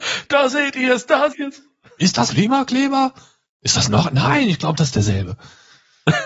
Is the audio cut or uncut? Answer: cut